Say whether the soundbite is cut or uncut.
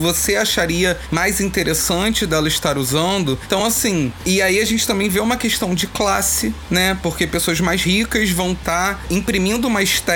uncut